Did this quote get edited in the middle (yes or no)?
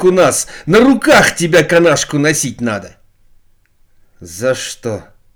no